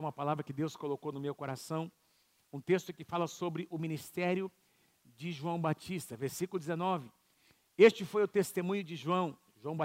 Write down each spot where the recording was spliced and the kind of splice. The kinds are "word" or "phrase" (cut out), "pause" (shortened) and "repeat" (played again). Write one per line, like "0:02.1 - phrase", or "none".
none